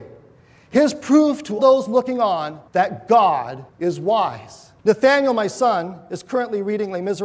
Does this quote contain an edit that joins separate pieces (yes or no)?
yes